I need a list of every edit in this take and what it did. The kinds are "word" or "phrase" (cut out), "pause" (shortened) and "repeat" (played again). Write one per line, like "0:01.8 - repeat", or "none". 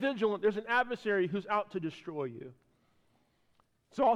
none

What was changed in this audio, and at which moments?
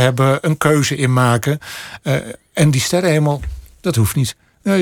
none

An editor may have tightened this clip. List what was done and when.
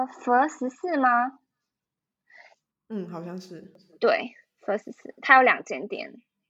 none

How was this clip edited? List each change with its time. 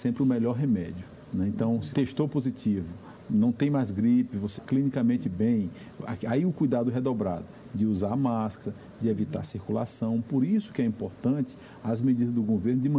0:01.9 - word
0:04.6 - word

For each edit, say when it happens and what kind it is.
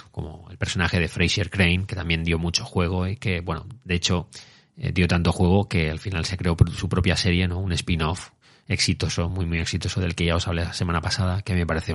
none

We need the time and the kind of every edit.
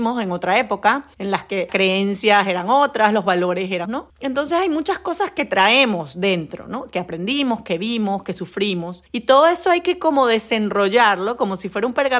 0:01.7 - word
0:03.9 - word
0:09.1 - pause

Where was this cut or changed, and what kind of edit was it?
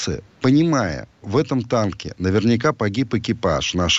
0:01.2 - word

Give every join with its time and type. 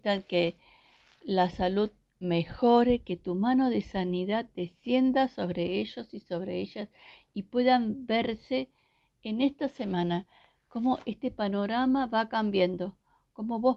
none

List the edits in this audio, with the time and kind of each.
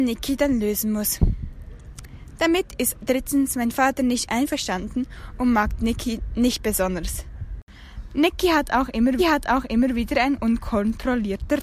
0:09.2 - repeat

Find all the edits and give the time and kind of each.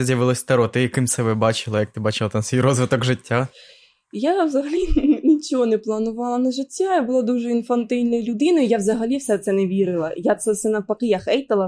none

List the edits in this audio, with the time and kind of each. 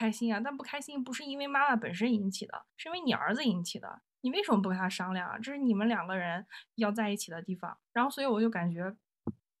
0:02.7 - pause
0:06.7 - pause
0:07.9 - pause

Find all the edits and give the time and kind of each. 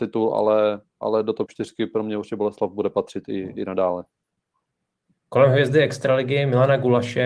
none

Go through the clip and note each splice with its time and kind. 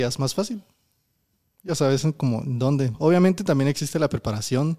none

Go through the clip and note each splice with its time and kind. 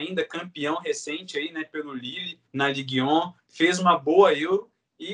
0:02.4 - pause

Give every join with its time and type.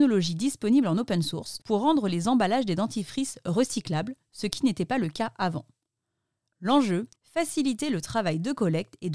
0:01.6 - pause
0:07.2 - pause

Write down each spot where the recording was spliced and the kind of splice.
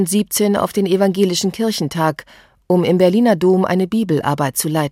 none

